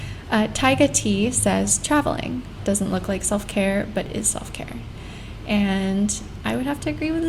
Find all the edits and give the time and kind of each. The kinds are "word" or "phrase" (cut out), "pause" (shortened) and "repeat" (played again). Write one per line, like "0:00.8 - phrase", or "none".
none